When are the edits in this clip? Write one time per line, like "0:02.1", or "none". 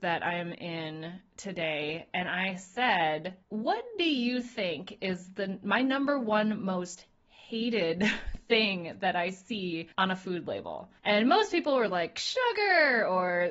0:03.4
0:09.9
0:11.0